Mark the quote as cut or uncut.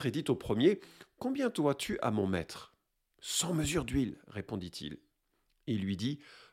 uncut